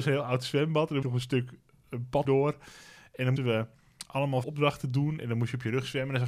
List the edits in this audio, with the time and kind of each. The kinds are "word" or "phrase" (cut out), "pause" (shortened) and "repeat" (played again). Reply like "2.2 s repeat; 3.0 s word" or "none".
1.0 s word; 2.2 s phrase; 3.4 s word; 4.4 s word